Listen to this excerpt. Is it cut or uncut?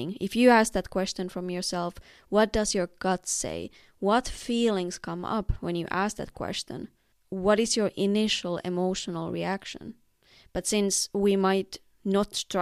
uncut